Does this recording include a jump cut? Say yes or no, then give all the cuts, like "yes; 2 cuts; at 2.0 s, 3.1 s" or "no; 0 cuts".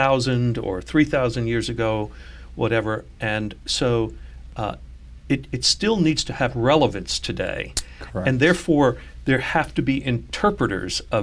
no; 0 cuts